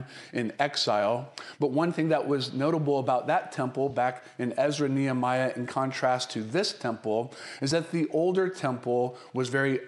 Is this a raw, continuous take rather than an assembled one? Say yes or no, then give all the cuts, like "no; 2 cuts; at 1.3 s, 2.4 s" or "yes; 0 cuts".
yes; 0 cuts